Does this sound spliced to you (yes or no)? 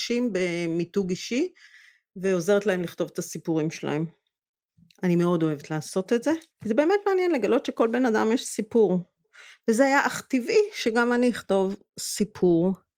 yes